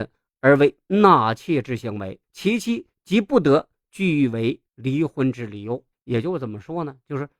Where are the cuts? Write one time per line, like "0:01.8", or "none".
0:02.2
0:04.7
0:05.9